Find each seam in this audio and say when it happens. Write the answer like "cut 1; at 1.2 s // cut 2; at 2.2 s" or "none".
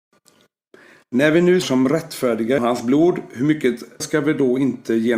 cut 1; at 1.6 s // cut 2; at 2.6 s // cut 3; at 4.0 s